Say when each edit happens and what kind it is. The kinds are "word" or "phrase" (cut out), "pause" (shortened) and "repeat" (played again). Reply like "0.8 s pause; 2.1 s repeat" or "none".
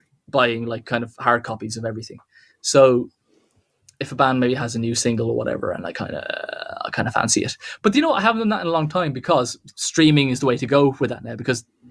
none